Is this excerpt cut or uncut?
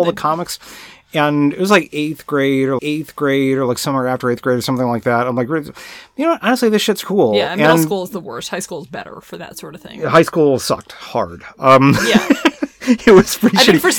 cut